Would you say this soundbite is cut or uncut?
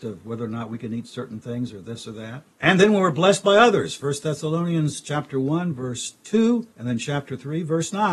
cut